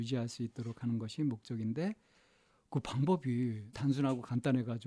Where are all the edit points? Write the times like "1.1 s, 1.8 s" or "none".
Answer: 3.7 s